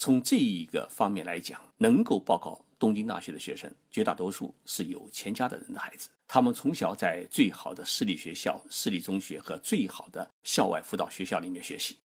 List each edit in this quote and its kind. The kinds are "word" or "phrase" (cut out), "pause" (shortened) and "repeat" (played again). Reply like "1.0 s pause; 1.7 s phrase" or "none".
1.7 s pause; 3.8 s pause; 6.2 s pause; 10.3 s pause